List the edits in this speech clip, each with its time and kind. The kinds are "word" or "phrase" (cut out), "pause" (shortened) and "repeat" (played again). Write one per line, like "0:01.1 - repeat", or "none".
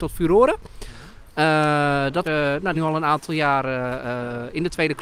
0:02.2 - word
0:02.7 - phrase